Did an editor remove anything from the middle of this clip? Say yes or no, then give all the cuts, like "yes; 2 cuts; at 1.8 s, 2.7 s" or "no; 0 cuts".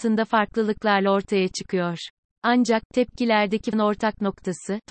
yes; 1 cut; at 3.7 s